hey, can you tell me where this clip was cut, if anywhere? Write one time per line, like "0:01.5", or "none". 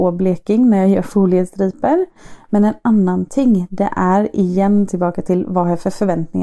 none